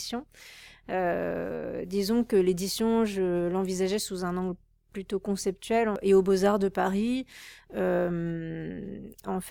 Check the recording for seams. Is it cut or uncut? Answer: uncut